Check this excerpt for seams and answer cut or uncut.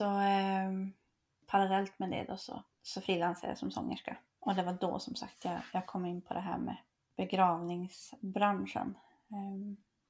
cut